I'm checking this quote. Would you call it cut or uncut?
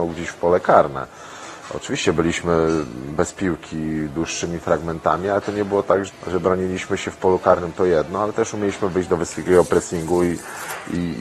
cut